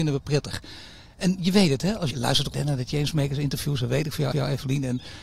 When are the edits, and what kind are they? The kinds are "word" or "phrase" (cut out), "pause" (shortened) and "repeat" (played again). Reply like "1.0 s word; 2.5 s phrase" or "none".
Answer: 2.1 s word; 2.5 s word; 4.3 s repeat